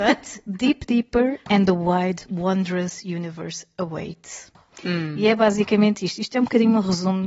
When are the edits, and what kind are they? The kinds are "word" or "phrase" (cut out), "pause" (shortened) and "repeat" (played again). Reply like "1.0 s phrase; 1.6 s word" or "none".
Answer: none